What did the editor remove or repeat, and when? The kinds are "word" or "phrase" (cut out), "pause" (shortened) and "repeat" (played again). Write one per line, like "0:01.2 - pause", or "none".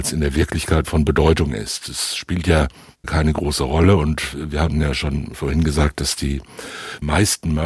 none